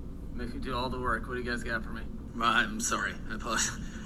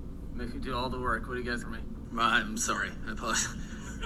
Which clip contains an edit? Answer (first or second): second